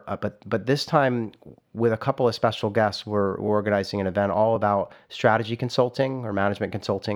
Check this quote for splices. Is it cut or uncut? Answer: uncut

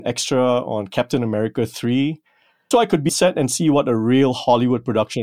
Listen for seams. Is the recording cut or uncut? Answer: cut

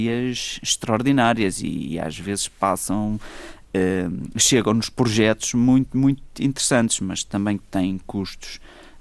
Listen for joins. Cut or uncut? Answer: uncut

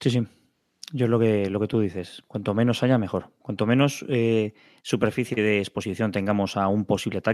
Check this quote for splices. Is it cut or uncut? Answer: uncut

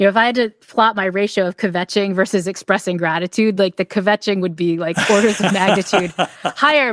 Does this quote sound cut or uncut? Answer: uncut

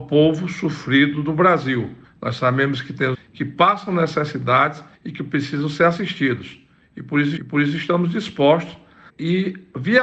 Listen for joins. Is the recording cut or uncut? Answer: cut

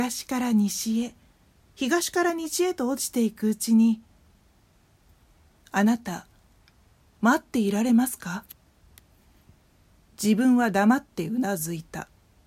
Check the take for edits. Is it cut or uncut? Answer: uncut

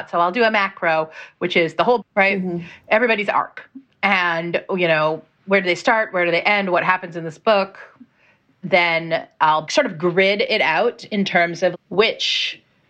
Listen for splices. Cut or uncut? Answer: cut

